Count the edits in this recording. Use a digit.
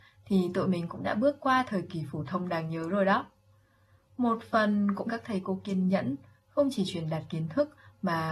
1